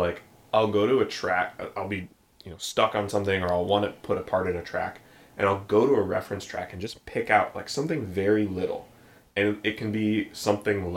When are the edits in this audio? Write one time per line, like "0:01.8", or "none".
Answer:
none